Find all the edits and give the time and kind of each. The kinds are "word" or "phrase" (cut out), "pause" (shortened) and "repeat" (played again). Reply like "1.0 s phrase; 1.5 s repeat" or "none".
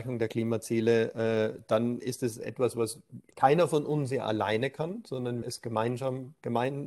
5.4 s word